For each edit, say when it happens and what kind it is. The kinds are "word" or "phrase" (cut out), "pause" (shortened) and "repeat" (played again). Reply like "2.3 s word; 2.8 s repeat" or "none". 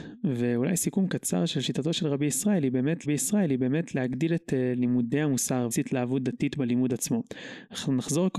3.0 s repeat; 5.7 s word